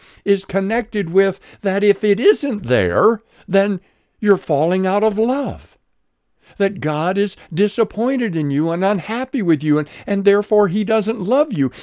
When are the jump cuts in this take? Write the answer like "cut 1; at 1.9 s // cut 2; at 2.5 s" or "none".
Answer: none